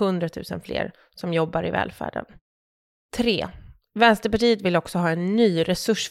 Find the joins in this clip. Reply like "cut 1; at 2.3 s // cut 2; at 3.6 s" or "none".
none